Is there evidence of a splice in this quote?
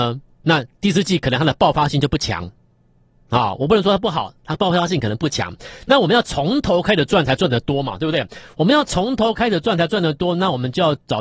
no; 0 cuts

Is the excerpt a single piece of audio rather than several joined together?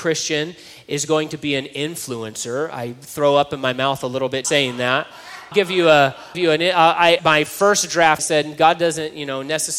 no; 5 cuts; at 4.4 s, 5.5 s, 6.3 s, 7.2 s, 8.2 s

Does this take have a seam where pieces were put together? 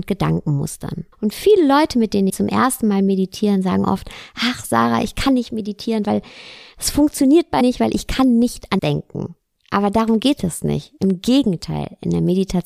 yes; 5 cuts; at 1.1 s, 2.3 s, 7.6 s, 8.8 s, 9.6 s

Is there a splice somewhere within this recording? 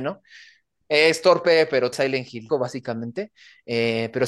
yes; 2 cuts; at 1.9 s, 2.5 s

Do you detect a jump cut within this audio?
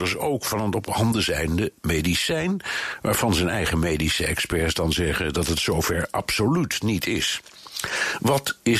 no; 0 cuts

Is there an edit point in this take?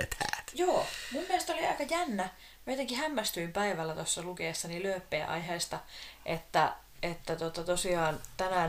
no; 0 cuts

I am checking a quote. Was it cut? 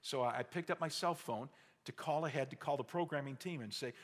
no; 0 cuts

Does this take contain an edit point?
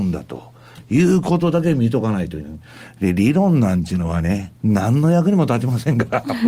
yes; 1 cut; at 4.6 s

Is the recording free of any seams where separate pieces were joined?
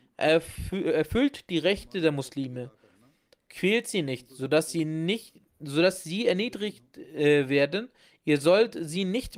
yes; 0 cuts

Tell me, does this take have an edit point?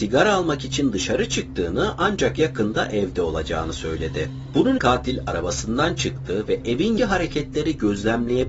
yes; 2 cuts; at 4.8 s, 7.0 s

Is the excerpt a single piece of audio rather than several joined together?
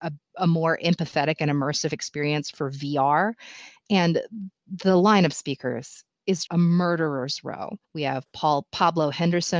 no; 2 cuts; at 6.5 s, 7.8 s

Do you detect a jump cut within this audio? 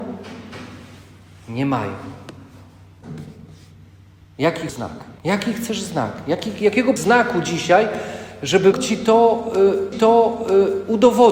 yes; 5 cuts; at 4.7 s, 5.2 s, 7.0 s, 8.7 s, 9.9 s

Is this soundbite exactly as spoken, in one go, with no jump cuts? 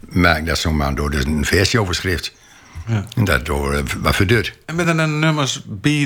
yes; 0 cuts

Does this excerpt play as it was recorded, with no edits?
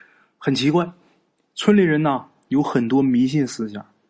yes; 0 cuts

